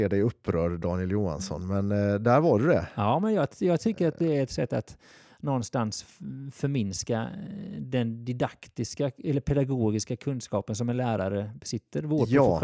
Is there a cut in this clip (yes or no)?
no